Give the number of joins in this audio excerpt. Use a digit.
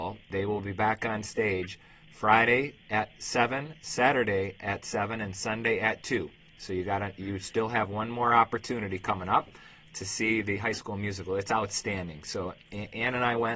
1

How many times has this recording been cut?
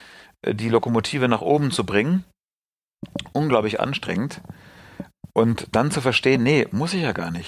0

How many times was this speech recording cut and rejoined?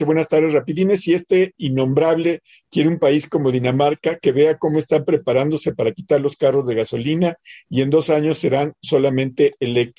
0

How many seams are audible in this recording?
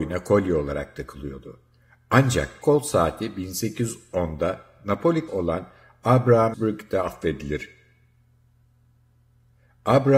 3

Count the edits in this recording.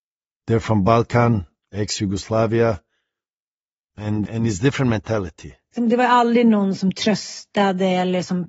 1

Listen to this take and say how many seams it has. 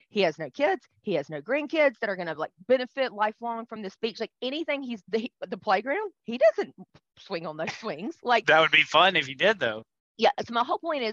0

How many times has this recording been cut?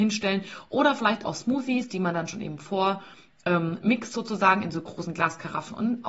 0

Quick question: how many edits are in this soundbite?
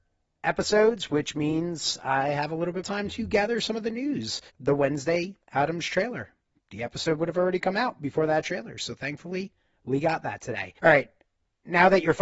4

